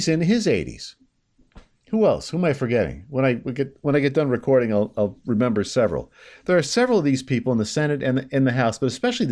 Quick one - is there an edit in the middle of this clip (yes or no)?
no